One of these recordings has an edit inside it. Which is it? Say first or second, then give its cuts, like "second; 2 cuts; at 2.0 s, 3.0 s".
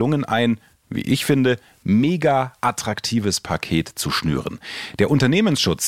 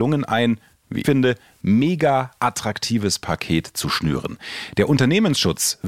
second; 1 cut; at 1.0 s